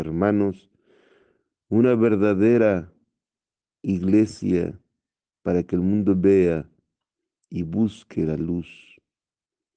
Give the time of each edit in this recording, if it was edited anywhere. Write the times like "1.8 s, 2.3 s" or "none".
none

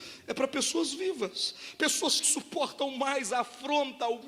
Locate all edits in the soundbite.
2.2 s

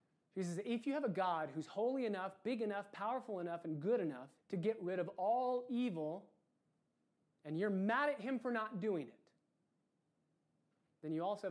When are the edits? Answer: 4.4 s

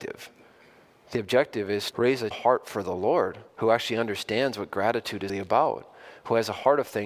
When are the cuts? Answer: 1.9 s, 2.3 s, 3.5 s, 5.3 s

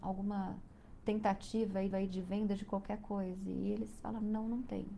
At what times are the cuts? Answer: 1.9 s

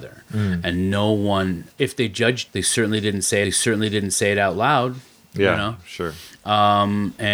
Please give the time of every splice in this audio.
1.7 s, 2.5 s, 3.4 s

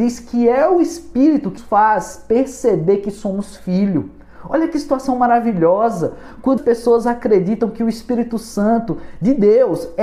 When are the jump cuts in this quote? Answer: 1.6 s, 6.6 s

